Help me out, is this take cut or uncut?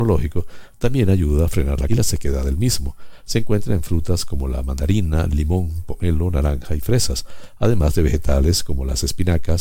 cut